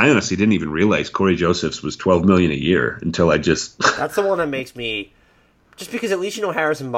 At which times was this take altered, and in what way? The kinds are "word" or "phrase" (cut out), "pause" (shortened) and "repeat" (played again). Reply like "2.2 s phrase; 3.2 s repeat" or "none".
none